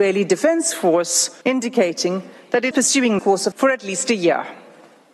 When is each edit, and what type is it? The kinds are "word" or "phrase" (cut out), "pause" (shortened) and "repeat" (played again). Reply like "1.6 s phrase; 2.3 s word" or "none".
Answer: 1.4 s pause; 2.7 s word; 3.2 s word; 3.5 s word